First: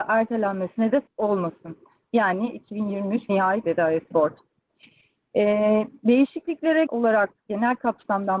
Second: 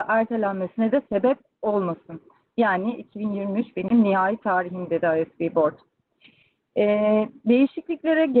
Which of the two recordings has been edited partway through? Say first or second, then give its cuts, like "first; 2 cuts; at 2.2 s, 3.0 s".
first; 5 cuts; at 1.1 s, 3.3 s, 3.6 s, 4.1 s, 6.9 s